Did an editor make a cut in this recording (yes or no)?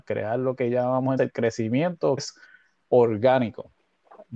yes